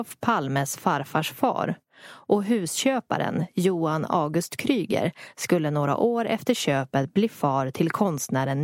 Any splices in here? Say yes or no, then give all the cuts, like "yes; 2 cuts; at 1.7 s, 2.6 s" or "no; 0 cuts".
no; 0 cuts